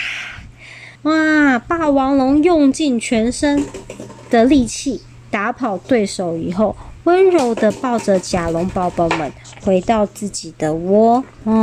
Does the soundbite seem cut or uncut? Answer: cut